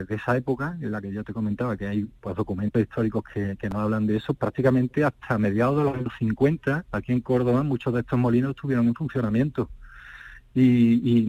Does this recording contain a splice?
yes; 1 cut; at 4.4 s

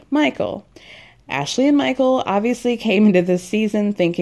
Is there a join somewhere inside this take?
no; 0 cuts

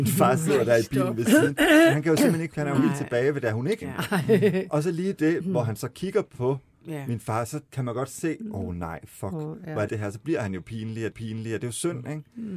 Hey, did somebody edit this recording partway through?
yes; 5 cuts; at 2.5 s, 3.8 s, 7.7 s, 9.9 s, 11.1 s

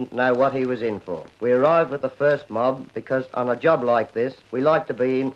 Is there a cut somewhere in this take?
yes; 2 cuts; at 1.3 s, 4.4 s

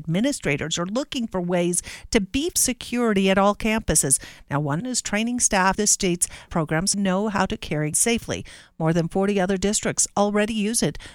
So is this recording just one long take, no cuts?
no; 6 cuts; at 2.5 s, 4.8 s, 5.7 s, 6.5 s, 6.9 s, 7.9 s

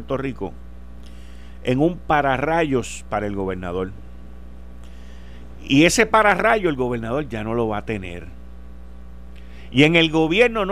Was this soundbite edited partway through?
no; 0 cuts

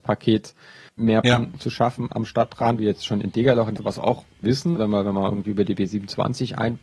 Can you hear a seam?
yes; 5 cuts; at 1.2 s, 2.8 s, 3.8 s, 4.4 s, 4.8 s

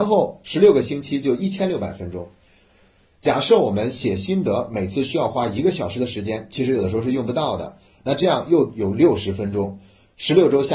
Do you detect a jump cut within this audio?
no; 0 cuts

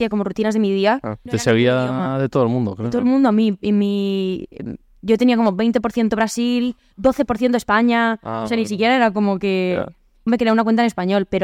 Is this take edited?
yes; 2 cuts; at 1.3 s, 10.3 s

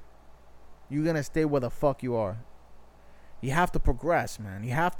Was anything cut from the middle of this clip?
no; 0 cuts

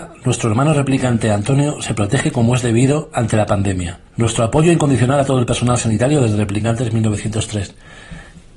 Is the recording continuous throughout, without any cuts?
no; 1 cut; at 4.1 s

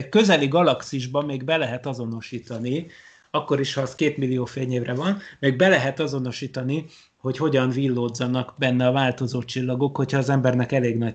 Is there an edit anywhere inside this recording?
no; 0 cuts

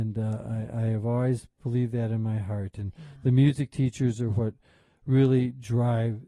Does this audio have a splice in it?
no; 0 cuts

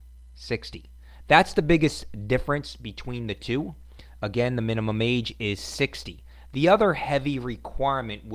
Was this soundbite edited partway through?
no; 0 cuts

